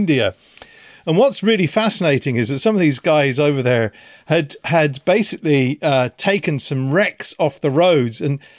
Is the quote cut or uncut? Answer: uncut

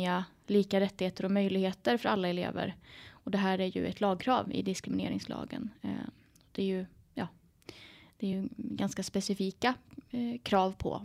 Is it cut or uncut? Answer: uncut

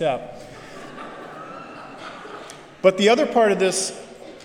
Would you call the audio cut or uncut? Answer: uncut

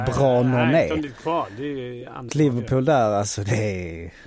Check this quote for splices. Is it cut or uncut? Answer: cut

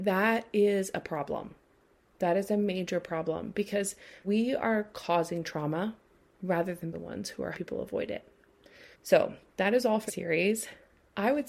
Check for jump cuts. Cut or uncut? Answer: cut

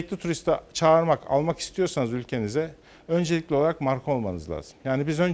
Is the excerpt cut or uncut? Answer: uncut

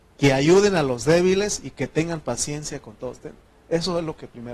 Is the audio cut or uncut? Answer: uncut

